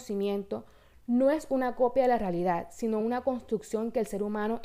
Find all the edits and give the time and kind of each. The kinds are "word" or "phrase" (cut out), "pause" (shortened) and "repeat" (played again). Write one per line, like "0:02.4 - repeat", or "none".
none